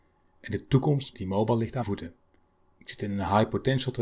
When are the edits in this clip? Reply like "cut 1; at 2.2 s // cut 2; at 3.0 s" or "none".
cut 1; at 1.1 s // cut 2; at 1.8 s